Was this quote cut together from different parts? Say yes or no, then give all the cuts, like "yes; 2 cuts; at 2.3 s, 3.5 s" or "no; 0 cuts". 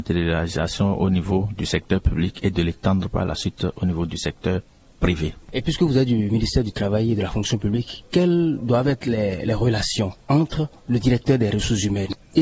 yes; 2 cuts; at 5.4 s, 10.2 s